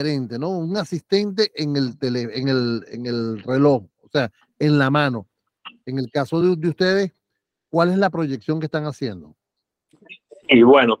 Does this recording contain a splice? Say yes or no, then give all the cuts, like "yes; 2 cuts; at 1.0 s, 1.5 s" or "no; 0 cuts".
no; 0 cuts